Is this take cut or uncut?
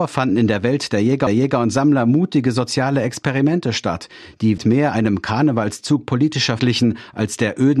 cut